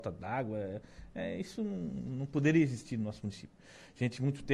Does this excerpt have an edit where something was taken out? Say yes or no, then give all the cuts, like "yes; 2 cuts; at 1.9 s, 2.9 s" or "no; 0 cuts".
no; 0 cuts